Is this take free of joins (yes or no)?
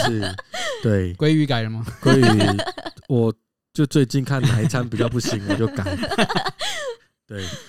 yes